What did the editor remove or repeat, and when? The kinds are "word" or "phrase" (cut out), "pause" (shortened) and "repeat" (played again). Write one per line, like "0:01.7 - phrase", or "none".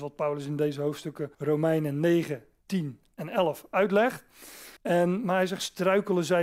0:01.3 - pause
0:04.8 - pause